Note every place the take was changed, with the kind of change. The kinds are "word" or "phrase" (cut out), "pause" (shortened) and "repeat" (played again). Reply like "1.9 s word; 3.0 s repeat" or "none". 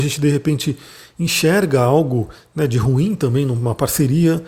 none